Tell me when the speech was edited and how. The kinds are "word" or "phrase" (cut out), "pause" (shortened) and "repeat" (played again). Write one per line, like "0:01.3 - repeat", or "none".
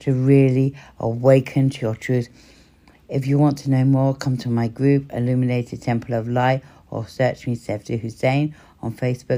none

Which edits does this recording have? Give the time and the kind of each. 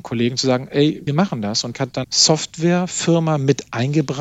0:01.1 - word
0:01.7 - word
0:02.0 - word

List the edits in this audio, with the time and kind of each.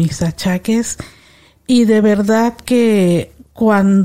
none

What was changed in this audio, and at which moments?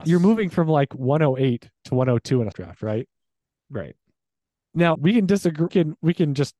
0:02.5 - word
0:04.9 - word
0:05.7 - word

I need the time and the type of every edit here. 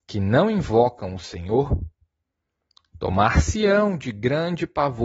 none

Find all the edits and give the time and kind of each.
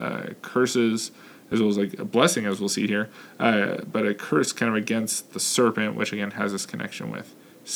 none

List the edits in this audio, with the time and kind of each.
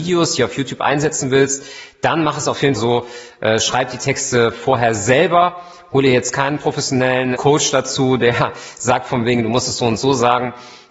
0:02.8 - word
0:07.4 - word

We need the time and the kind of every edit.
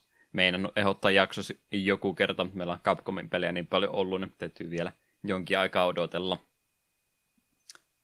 none

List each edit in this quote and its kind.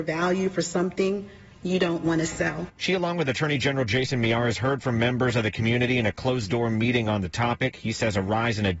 0:01.5 - pause

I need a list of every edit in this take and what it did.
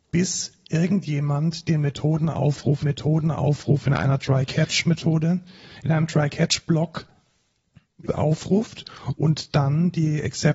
0:02.8 - repeat
0:08.1 - word

